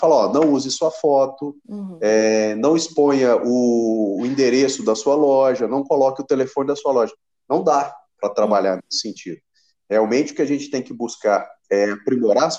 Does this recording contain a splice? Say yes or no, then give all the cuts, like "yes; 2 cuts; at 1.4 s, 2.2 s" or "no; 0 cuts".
no; 0 cuts